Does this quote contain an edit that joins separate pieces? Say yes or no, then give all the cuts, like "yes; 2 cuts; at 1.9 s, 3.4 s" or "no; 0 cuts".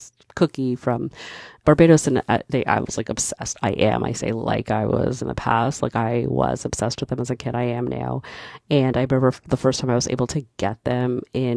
yes; 2 cuts; at 1.6 s, 5.2 s